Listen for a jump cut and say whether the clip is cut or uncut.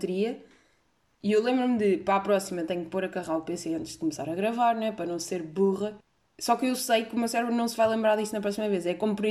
uncut